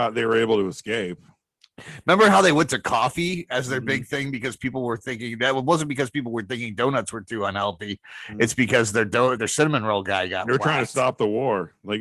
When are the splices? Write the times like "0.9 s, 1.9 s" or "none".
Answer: 9.4 s

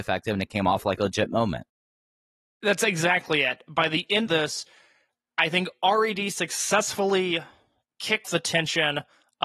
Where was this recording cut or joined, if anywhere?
4.3 s, 8.2 s

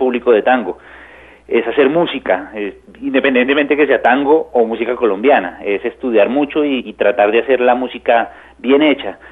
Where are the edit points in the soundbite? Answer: 6.8 s

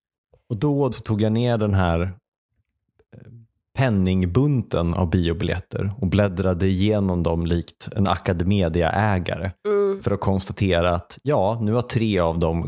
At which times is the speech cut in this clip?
0.9 s, 9.6 s

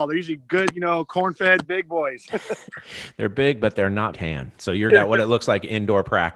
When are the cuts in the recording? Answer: 1.6 s, 4.1 s, 4.9 s

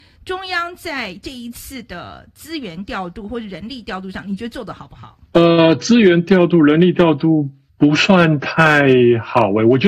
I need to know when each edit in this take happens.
5.3 s, 7.7 s

